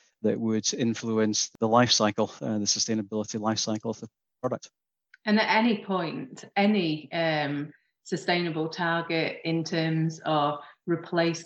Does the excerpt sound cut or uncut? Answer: uncut